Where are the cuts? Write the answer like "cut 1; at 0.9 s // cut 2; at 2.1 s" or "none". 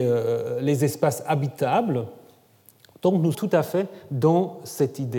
cut 1; at 3.3 s